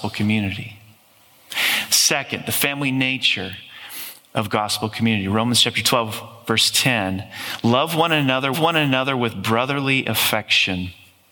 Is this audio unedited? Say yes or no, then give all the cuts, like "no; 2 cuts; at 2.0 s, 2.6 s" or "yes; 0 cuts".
no; 1 cut; at 8.5 s